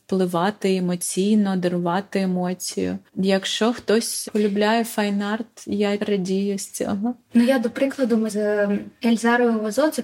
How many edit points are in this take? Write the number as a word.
four